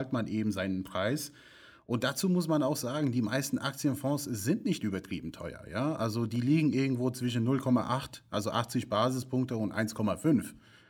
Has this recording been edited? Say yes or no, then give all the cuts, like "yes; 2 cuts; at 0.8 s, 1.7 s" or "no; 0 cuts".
no; 0 cuts